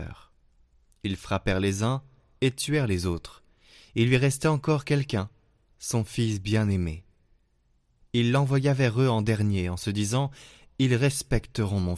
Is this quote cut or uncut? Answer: uncut